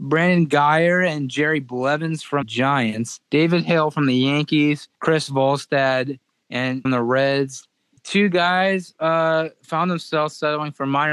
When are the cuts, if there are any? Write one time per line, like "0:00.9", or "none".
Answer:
0:02.4
0:03.2
0:04.9
0:06.8
0:08.0